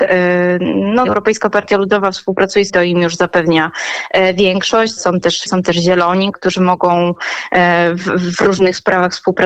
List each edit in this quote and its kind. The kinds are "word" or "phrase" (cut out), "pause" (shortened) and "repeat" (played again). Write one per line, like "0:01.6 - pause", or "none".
0:01.0 - word
0:02.7 - word
0:05.0 - word
0:05.5 - word
0:06.3 - word